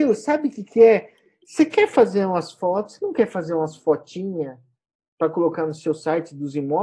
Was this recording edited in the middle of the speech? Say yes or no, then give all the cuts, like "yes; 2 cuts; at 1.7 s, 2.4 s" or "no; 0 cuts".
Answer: no; 0 cuts